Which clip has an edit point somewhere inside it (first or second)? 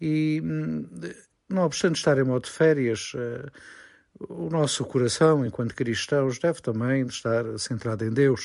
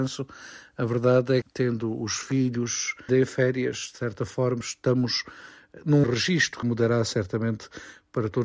second